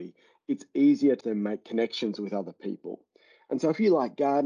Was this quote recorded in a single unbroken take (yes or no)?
no